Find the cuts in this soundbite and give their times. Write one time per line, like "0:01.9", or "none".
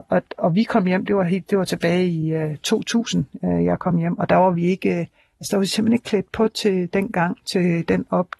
none

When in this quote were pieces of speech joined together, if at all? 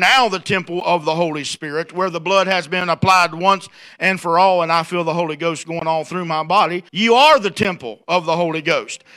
0:06.9

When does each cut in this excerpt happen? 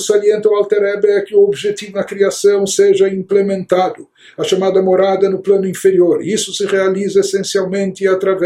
0:01.9

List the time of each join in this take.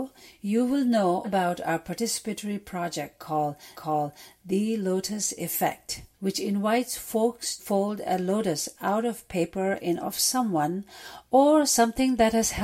0:01.2
0:03.7
0:06.1
0:07.6
0:10.0

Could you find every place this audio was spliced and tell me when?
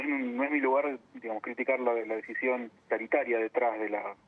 0:01.0
0:02.8

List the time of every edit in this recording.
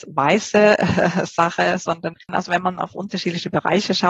0:02.2

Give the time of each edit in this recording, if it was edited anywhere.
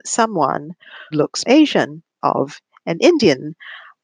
0:01.1
0:01.4
0:02.2

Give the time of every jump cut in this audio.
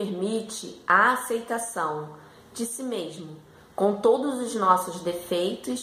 none

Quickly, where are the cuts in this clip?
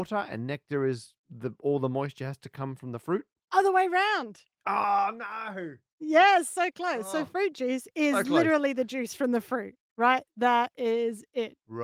0:01.2
0:03.4

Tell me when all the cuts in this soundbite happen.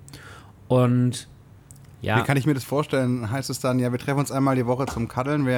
none

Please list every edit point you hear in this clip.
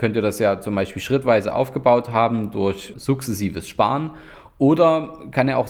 0:02.9

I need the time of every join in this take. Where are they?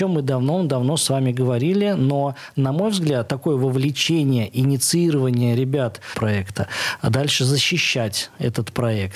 0:03.3
0:06.1

